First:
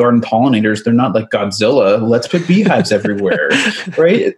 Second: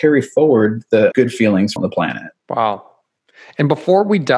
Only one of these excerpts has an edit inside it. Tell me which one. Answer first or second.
second